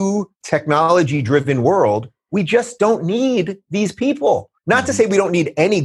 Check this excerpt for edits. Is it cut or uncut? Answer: cut